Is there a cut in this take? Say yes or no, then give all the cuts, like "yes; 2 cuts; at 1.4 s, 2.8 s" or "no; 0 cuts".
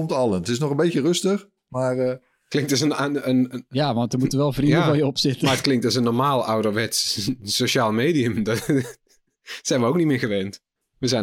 no; 0 cuts